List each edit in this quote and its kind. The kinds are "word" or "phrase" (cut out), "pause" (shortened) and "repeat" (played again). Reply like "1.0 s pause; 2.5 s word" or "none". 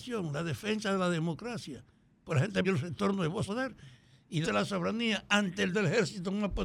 2.6 s word; 3.5 s word; 4.4 s word; 5.7 s word